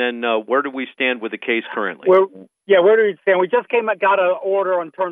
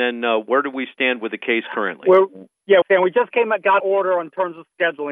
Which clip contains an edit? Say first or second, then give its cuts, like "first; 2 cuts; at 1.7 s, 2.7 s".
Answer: second; 2 cuts; at 2.8 s, 3.8 s